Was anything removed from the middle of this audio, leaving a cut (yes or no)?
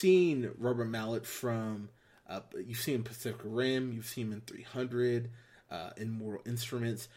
no